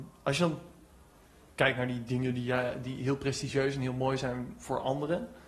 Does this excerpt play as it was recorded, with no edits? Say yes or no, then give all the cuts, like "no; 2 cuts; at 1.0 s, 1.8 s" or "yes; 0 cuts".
yes; 0 cuts